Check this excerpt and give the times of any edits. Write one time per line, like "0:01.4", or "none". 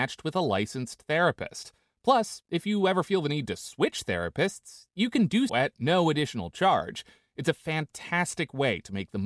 0:05.5